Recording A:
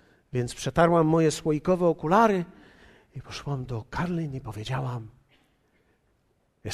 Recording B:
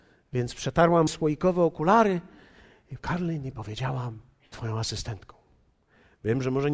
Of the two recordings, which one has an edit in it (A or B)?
B